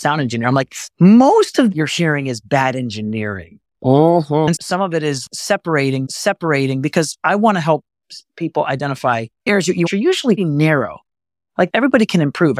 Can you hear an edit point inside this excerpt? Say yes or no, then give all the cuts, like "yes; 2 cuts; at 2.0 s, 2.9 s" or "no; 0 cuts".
yes; 5 cuts; at 0.9 s, 1.7 s, 6.1 s, 9.9 s, 10.4 s